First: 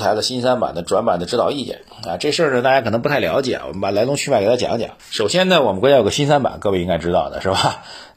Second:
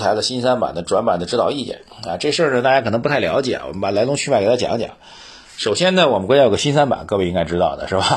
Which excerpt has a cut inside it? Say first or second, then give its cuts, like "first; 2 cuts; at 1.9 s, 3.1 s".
first; 1 cut; at 5.0 s